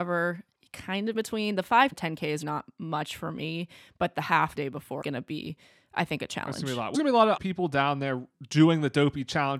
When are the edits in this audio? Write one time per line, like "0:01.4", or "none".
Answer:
0:01.1
0:01.9
0:02.4
0:04.6
0:05.0
0:06.9
0:07.4